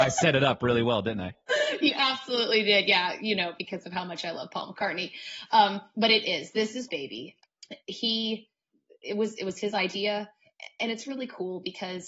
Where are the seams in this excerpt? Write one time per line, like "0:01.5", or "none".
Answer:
0:06.9

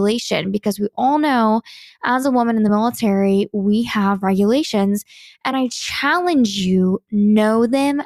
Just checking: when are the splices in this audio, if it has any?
none

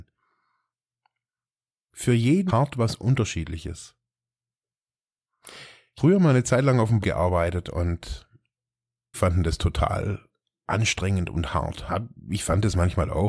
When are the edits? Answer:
0:02.5
0:06.0
0:07.0
0:09.1

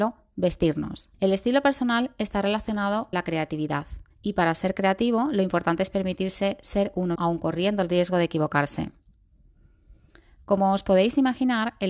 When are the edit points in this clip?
0:01.1
0:03.1
0:04.1
0:07.2

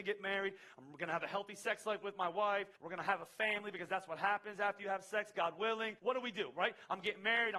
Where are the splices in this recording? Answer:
0:02.7
0:06.0

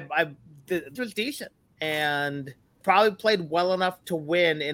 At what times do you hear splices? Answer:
0:01.0
0:02.8

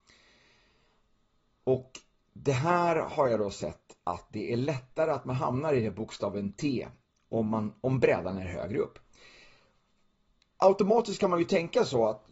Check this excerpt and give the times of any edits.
none

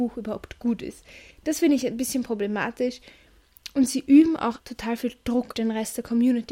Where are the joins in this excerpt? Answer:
0:01.3
0:04.6
0:05.5

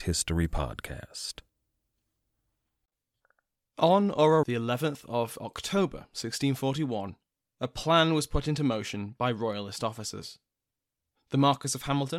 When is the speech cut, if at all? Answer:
0:04.4

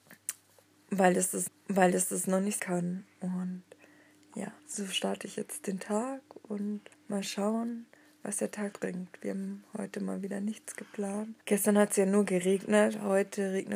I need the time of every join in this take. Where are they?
0:01.5
0:02.6
0:04.6
0:06.9
0:08.7
0:11.4

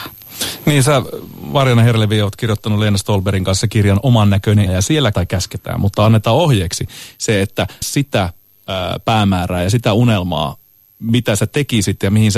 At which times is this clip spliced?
0:04.7
0:05.1
0:07.8

